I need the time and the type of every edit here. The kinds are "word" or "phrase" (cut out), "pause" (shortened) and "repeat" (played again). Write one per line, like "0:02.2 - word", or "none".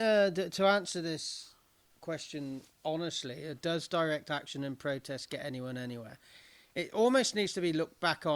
none